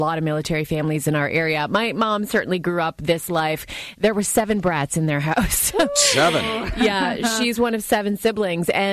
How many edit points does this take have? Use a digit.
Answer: 0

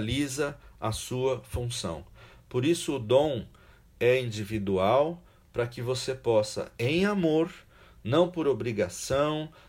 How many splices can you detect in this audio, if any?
0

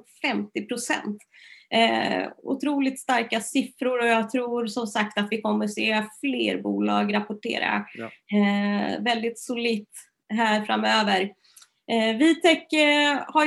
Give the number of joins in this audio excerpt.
0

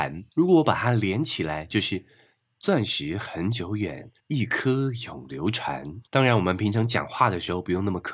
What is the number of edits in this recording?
2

